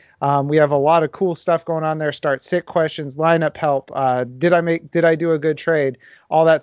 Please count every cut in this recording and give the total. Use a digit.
0